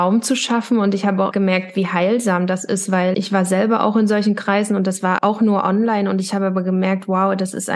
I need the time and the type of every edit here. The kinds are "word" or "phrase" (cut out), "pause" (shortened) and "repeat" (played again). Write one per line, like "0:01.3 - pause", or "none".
0:01.3 - word
0:03.1 - word
0:05.2 - word